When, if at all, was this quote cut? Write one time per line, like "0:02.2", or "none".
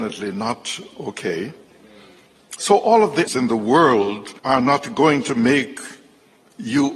0:03.3
0:04.4